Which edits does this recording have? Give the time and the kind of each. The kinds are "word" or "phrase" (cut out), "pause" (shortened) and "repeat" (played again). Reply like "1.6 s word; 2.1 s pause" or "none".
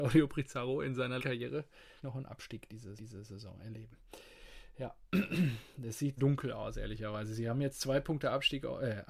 1.2 s word; 2.0 s word; 3.0 s repeat; 6.2 s phrase